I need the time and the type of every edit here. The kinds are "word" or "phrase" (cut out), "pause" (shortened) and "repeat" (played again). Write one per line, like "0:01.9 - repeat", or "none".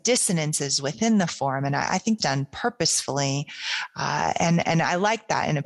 0:02.2 - word